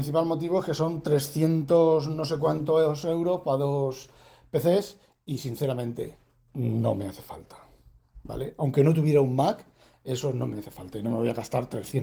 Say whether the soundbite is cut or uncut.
uncut